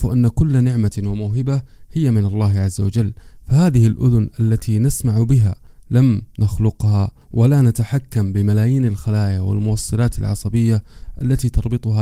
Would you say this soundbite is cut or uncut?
uncut